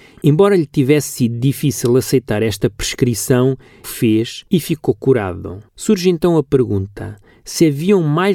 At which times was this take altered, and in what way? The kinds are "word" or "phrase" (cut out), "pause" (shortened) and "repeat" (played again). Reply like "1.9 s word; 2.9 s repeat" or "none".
3.8 s phrase; 4.5 s pause; 5.7 s pause